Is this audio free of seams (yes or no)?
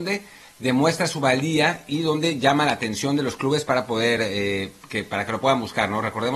yes